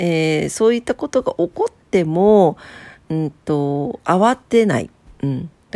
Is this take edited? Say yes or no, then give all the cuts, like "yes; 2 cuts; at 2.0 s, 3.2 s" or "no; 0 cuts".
yes; 1 cut; at 1.8 s